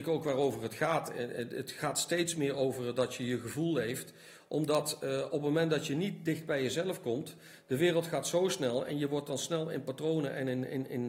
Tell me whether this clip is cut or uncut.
uncut